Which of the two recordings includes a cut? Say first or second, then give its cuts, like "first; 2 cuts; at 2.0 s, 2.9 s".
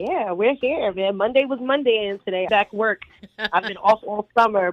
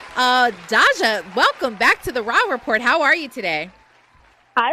first; 1 cut; at 2.5 s